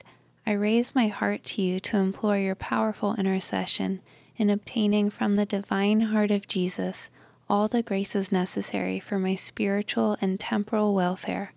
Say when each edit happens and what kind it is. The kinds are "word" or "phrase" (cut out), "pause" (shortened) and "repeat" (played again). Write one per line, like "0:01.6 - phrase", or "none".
none